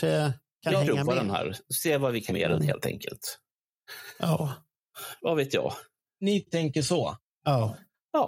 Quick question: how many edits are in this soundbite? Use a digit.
2